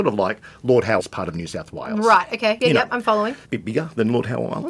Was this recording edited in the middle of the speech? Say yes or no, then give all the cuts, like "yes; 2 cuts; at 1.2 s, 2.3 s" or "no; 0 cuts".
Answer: yes; 3 cuts; at 1.0 s, 2.6 s, 3.4 s